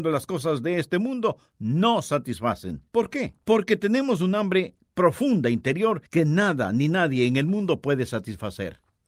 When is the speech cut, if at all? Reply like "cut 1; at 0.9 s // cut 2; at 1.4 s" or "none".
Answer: cut 1; at 2.9 s // cut 2; at 3.4 s // cut 3; at 6.1 s